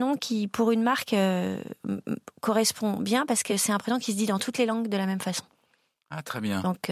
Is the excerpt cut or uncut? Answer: uncut